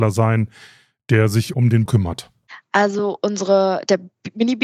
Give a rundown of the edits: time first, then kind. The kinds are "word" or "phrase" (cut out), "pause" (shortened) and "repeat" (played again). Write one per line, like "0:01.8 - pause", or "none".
0:01.5 - word
0:01.9 - word